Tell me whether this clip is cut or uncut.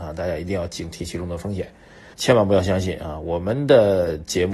cut